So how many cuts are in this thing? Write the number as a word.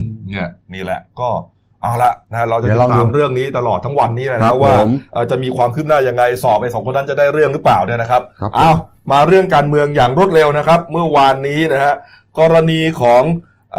zero